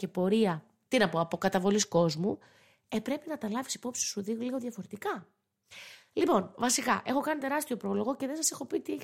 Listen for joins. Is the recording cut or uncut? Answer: uncut